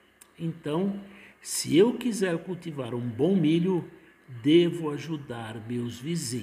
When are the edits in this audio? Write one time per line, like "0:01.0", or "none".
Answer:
none